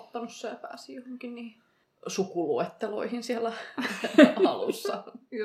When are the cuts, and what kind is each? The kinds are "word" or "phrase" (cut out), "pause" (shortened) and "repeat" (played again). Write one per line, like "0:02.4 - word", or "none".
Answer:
0:01.8 - pause

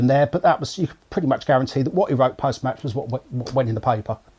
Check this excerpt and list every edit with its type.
0:01.0 - pause

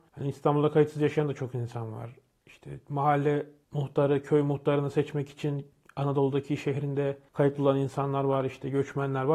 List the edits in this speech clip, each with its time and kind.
none

